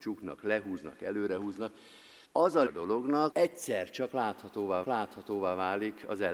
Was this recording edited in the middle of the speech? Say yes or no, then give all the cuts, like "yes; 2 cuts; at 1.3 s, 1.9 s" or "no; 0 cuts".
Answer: yes; 4 cuts; at 2.2 s, 2.7 s, 3.3 s, 4.8 s